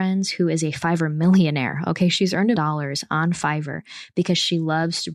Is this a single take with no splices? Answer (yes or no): no